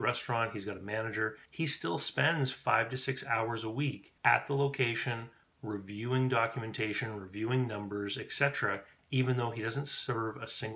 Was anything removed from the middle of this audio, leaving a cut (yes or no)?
yes